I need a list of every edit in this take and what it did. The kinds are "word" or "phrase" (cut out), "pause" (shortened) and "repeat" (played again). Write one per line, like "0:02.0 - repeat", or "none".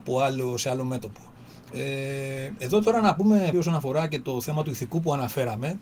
0:03.5 - word